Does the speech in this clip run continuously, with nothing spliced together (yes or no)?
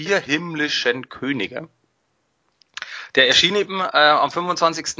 yes